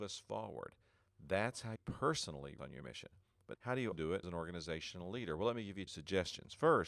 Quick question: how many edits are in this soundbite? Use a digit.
6